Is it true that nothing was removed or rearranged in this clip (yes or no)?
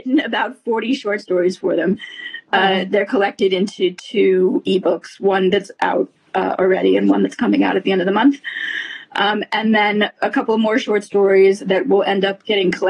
yes